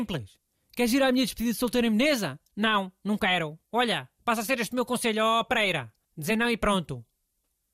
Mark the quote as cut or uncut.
cut